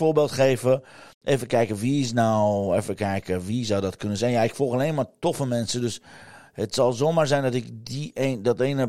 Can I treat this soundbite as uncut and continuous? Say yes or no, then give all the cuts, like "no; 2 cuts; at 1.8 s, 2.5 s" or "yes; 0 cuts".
yes; 0 cuts